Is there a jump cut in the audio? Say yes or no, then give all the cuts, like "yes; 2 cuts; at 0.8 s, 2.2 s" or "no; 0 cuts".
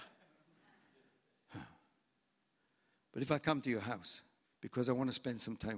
yes; 1 cut; at 4.4 s